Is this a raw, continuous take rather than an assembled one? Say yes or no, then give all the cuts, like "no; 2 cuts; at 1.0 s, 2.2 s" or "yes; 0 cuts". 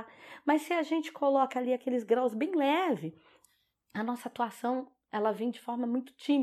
yes; 0 cuts